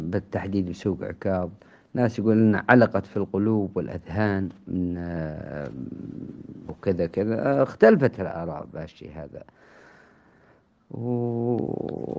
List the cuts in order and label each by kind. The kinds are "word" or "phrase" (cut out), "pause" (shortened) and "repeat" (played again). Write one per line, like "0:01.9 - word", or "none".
0:06.7 - word